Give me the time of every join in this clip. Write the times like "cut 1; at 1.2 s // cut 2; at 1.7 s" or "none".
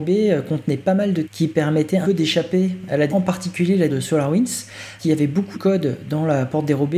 cut 1; at 1.2 s // cut 2; at 2.0 s // cut 3; at 3.1 s // cut 4; at 3.9 s // cut 5; at 5.0 s // cut 6; at 5.5 s